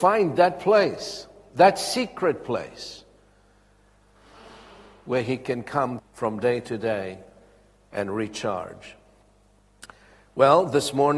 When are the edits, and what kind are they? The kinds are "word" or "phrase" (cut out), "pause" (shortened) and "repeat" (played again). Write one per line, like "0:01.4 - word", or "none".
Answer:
0:06.0 - word